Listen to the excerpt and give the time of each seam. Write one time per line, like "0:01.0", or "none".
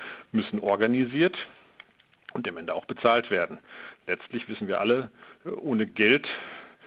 none